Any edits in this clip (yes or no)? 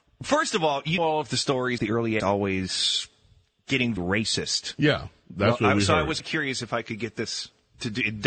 yes